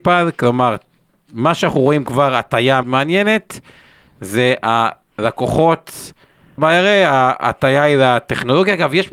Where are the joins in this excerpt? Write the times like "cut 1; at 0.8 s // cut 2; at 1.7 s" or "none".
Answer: cut 1; at 2.8 s // cut 2; at 6.6 s